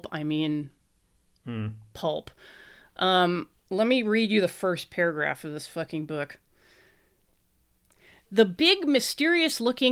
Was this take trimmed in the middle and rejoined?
no; 0 cuts

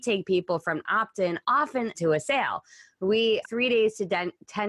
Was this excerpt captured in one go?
no; 2 cuts; at 1.9 s, 3.4 s

